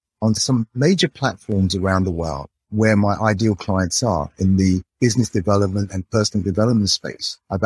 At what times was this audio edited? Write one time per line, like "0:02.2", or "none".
0:04.9